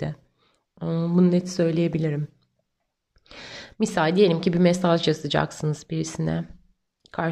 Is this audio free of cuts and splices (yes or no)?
yes